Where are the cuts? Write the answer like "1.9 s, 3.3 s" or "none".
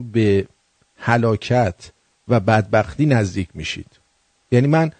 none